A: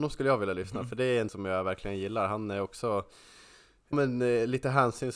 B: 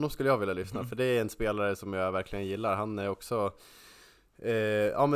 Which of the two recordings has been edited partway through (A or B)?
A